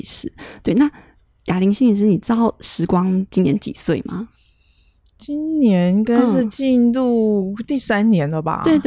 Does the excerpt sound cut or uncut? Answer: uncut